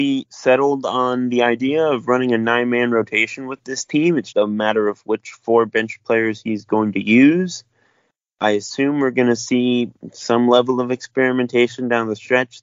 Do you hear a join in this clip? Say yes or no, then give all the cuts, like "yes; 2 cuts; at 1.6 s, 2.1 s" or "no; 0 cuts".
yes; 1 cut; at 4.3 s